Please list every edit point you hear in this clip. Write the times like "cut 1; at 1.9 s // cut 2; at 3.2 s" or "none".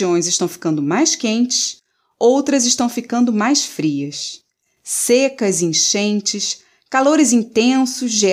none